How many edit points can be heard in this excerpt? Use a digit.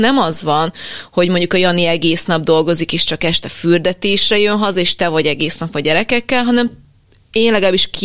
0